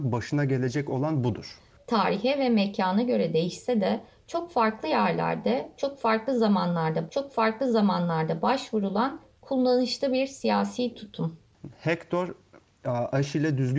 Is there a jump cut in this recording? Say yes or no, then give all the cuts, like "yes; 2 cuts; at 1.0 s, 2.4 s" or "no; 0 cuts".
yes; 1 cut; at 7.1 s